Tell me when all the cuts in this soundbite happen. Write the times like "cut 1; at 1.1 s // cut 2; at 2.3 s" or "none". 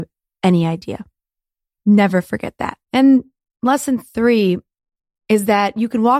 cut 1; at 1.6 s // cut 2; at 2.8 s